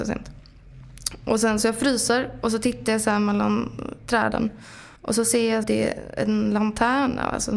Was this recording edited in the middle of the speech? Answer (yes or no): yes